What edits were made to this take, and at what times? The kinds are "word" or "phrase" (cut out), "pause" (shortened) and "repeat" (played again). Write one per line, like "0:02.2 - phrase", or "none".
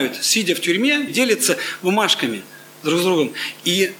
0:01.1 - word